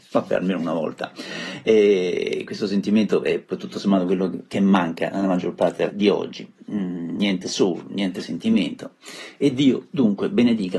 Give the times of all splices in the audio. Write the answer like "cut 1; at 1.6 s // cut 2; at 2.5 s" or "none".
cut 1; at 5.9 s